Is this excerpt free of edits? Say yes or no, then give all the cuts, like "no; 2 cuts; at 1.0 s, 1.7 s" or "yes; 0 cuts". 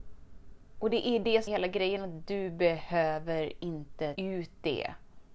no; 2 cuts; at 1.5 s, 4.1 s